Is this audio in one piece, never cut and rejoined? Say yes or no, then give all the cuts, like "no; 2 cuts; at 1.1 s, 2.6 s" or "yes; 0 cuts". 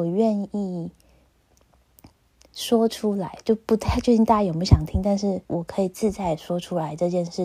no; 1 cut; at 5.5 s